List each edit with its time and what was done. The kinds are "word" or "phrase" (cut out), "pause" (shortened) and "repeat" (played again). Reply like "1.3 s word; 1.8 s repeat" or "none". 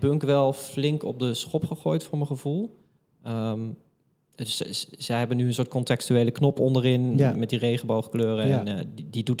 none